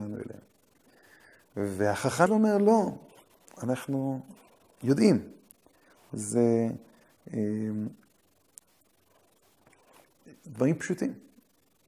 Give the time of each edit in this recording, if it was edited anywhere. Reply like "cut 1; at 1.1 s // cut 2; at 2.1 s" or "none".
cut 1; at 2.3 s